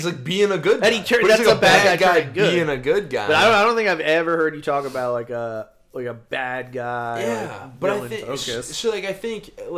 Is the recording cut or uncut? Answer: uncut